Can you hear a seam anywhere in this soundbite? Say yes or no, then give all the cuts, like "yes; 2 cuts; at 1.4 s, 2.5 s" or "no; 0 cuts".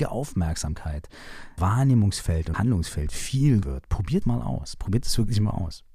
yes; 4 cuts; at 1.6 s, 2.5 s, 3.6 s, 4.2 s